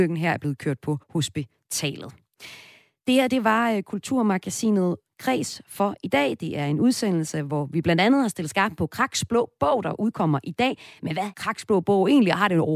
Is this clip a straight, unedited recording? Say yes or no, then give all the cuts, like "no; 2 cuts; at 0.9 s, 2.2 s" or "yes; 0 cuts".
no; 2 cuts; at 1.0 s, 11.3 s